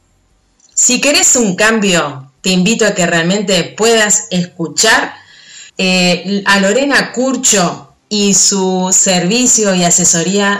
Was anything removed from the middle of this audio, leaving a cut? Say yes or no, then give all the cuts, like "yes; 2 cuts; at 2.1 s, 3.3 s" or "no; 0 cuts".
yes; 2 cuts; at 5.7 s, 8.0 s